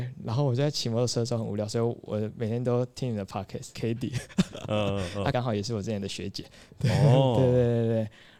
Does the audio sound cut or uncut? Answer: cut